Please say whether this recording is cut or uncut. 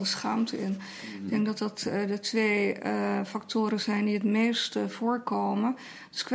uncut